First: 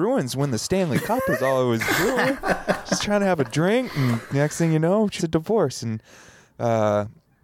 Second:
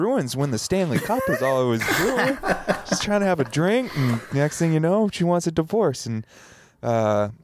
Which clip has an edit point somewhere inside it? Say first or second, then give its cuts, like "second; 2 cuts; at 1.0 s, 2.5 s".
first; 1 cut; at 5.2 s